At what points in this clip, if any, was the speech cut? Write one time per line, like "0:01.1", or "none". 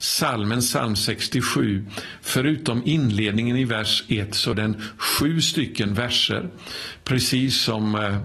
0:04.5